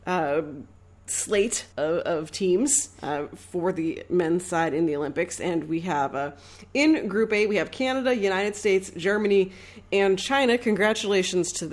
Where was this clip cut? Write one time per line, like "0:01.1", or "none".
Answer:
0:01.7